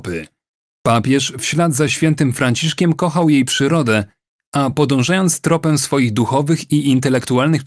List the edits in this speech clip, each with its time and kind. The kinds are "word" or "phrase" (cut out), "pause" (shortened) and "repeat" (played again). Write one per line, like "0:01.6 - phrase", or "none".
none